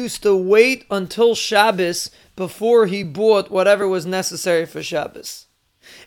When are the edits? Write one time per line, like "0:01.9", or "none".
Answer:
none